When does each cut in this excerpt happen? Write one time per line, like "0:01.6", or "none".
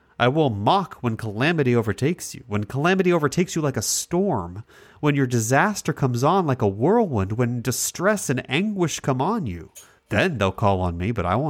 0:10.0